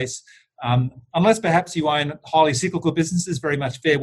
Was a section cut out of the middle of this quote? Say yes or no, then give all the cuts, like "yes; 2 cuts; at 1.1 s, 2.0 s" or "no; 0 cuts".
no; 0 cuts